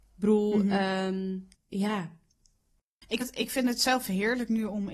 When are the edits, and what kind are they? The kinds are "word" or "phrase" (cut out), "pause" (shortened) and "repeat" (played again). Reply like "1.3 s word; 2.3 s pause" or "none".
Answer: 3.2 s word